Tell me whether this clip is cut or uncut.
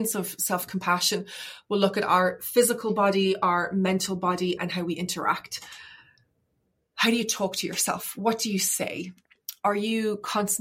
cut